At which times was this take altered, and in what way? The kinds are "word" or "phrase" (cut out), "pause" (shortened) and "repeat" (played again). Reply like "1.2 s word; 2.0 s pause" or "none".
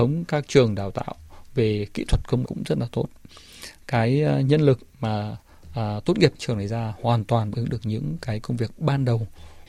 2.4 s word; 6.4 s phrase; 7.5 s word